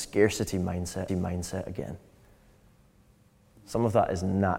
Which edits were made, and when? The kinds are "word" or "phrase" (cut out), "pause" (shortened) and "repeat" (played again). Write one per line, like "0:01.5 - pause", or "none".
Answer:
0:01.1 - repeat

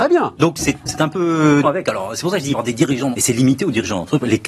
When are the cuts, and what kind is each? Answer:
0:01.6 - word
0:02.5 - phrase
0:03.1 - word

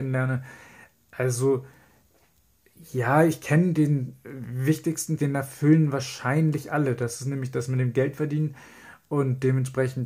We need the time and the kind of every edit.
0:05.2 - word

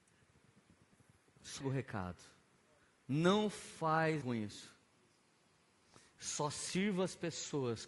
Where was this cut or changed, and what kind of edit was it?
0:01.6 - word
0:02.8 - pause
0:04.2 - word

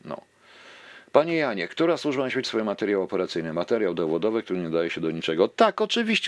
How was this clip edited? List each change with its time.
0:01.1 - pause
0:02.4 - word

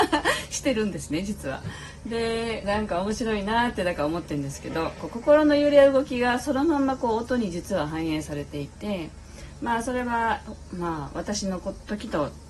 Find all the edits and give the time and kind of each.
0:02.6 - word

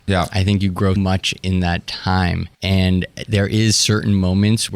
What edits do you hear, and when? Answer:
0:01.0 - word
0:02.5 - pause

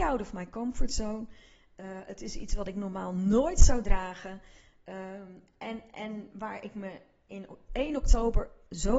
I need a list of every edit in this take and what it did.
none

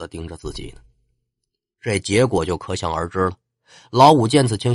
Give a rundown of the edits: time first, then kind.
none

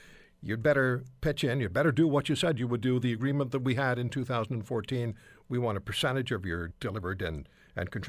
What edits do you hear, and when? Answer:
0:06.7 - word

